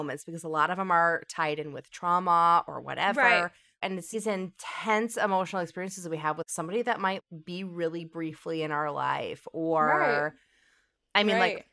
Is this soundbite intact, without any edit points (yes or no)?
yes